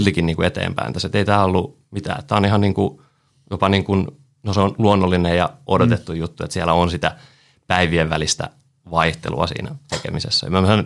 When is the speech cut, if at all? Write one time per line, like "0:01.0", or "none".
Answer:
none